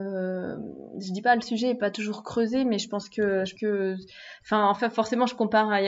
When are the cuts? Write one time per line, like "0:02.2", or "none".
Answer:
0:03.6